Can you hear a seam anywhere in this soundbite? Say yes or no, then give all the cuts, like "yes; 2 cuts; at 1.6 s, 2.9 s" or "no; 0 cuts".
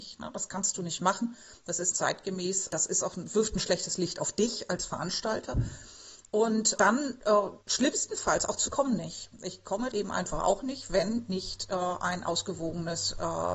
yes; 6 cuts; at 1.9 s, 2.7 s, 6.8 s, 7.6 s, 8.7 s, 9.9 s